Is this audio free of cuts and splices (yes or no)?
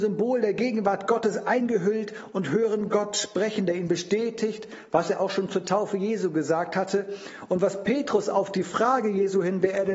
yes